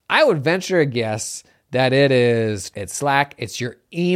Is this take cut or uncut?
cut